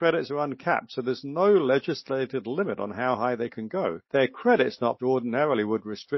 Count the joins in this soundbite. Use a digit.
2